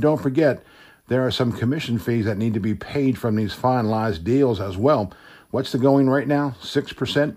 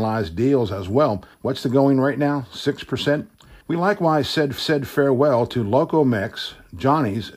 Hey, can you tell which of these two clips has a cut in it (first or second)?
second